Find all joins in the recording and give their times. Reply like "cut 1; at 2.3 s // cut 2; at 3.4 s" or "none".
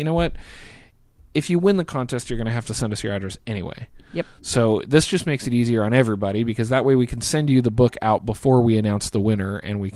none